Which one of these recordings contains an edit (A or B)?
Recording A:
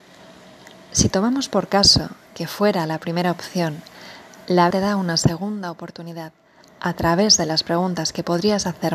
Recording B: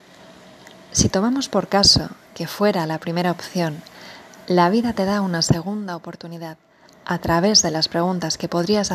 A